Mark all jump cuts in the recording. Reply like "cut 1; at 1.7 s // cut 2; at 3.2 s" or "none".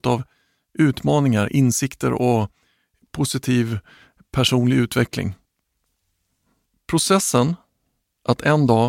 none